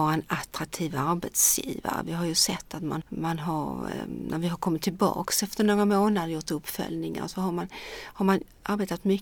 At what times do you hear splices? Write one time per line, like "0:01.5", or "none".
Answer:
0:03.0